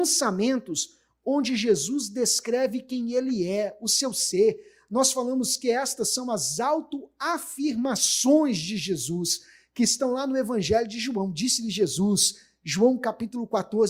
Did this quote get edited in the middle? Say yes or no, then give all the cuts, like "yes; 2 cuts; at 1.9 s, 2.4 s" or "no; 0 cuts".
no; 0 cuts